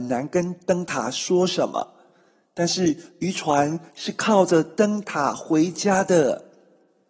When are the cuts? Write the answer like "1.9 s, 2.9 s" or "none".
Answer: none